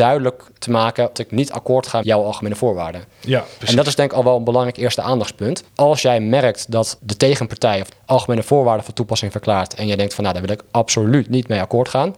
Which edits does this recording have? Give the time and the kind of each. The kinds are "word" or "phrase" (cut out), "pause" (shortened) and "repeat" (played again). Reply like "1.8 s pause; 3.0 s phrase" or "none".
1.1 s phrase; 2.0 s word; 5.7 s pause; 7.0 s word; 7.9 s phrase